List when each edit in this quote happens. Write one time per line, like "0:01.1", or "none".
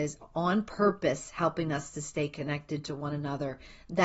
none